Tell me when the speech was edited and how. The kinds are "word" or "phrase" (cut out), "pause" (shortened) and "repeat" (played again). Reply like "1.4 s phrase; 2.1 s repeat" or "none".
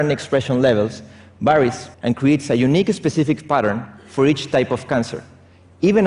1.9 s pause